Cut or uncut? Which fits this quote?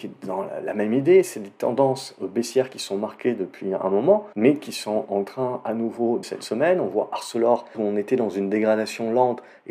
cut